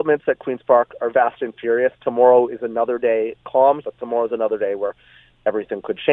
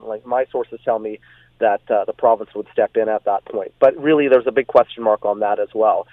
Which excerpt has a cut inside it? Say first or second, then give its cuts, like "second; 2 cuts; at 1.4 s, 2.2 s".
first; 2 cuts; at 1.1 s, 3.8 s